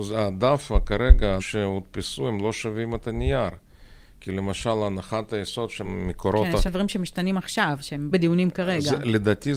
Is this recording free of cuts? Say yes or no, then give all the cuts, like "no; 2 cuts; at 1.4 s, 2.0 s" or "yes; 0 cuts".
no; 4 cuts; at 1.4 s, 5.8 s, 6.7 s, 8.1 s